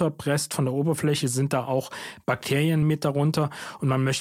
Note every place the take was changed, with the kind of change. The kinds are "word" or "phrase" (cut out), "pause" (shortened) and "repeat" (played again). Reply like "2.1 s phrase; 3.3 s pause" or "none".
none